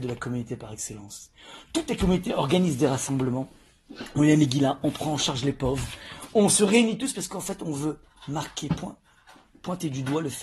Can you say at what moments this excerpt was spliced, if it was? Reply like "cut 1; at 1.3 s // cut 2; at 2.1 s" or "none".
none